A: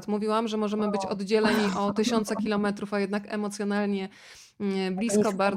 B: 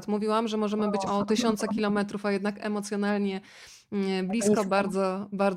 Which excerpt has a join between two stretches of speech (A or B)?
B